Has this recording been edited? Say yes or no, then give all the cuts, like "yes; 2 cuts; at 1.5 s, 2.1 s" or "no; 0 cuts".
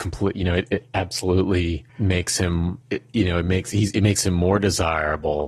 yes; 2 cuts; at 1.9 s, 2.8 s